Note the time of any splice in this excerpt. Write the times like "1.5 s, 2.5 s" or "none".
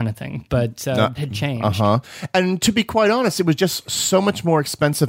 1.1 s